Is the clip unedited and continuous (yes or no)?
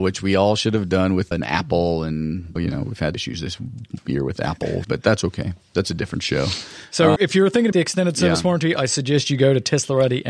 no